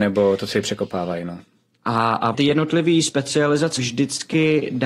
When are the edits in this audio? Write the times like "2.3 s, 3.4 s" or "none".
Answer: 2.3 s, 3.8 s